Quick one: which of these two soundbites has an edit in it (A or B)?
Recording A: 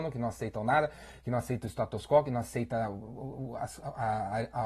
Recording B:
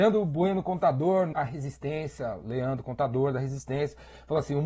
B